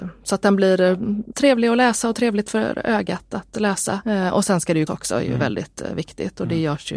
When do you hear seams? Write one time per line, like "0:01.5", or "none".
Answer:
0:01.3
0:04.9

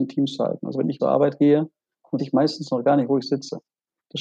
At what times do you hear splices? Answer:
0:01.0
0:02.2

